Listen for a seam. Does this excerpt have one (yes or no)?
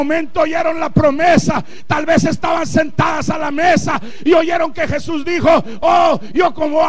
no